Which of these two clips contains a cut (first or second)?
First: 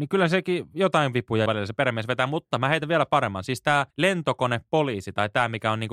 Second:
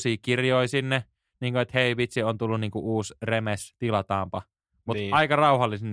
first